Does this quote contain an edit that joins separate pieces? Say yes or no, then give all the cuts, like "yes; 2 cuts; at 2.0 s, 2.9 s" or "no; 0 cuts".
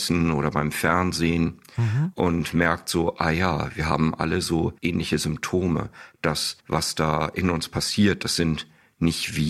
yes; 2 cuts; at 4.8 s, 6.6 s